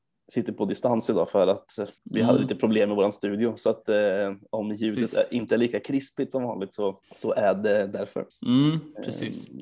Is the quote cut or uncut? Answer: cut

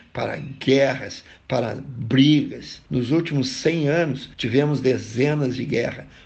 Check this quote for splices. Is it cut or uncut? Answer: cut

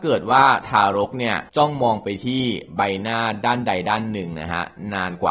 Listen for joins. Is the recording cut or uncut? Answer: cut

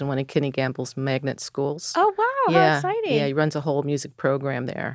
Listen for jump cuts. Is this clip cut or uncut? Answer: uncut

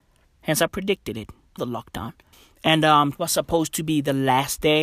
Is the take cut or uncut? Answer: cut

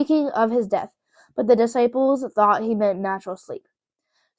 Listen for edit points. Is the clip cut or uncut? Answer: uncut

